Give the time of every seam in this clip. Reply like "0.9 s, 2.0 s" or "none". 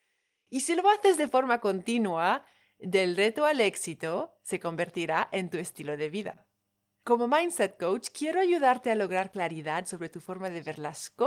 none